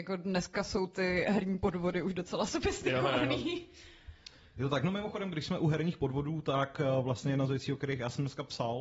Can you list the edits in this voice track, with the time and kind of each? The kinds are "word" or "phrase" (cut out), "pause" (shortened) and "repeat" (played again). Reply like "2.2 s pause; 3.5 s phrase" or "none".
none